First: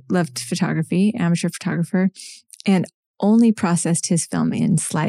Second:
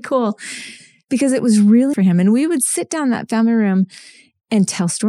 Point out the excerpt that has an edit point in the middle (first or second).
second